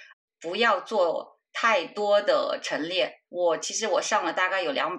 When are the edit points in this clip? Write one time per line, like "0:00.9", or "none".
0:03.2